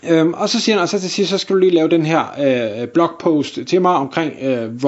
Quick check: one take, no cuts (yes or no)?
yes